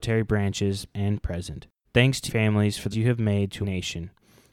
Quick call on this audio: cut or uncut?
cut